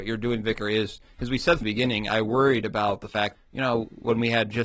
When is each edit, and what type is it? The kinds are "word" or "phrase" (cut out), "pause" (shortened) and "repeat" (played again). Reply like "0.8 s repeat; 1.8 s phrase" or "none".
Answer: 1.6 s word; 3.3 s word

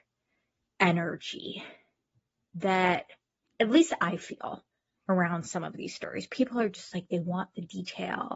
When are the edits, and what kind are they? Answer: none

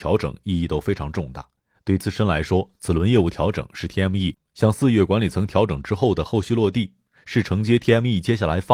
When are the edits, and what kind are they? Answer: 2.0 s word

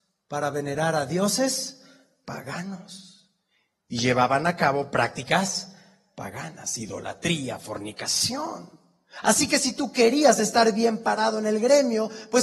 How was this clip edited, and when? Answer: none

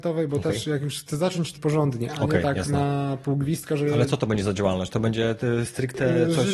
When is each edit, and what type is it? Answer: 1.6 s word

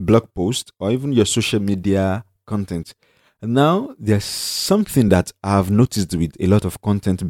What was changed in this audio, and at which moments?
none

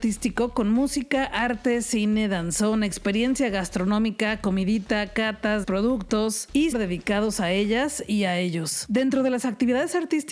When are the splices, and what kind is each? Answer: 5.6 s word; 6.7 s phrase

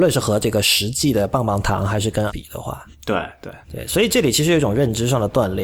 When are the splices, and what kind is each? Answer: 2.3 s word; 2.9 s pause; 3.6 s pause

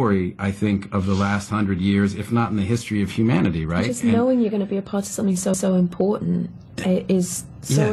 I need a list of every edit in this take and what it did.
5.5 s repeat

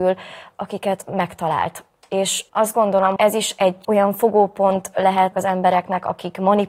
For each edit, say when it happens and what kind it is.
1.0 s word; 2.5 s pause; 3.2 s word; 3.8 s word; 5.3 s word

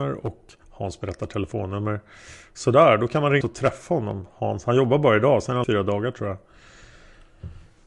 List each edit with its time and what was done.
3.4 s word; 5.6 s word

